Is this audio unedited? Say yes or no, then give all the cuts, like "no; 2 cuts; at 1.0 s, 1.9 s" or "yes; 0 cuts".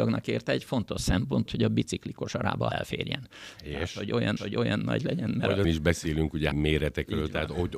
no; 5 cuts; at 1.5 s, 2.7 s, 4.4 s, 5.6 s, 6.5 s